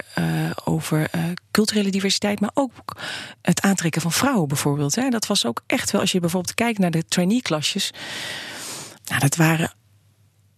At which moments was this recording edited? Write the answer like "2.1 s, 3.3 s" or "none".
9.0 s